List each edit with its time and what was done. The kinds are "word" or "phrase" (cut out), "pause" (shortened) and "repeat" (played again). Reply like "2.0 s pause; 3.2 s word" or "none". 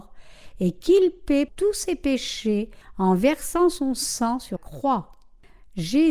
1.5 s word; 4.6 s word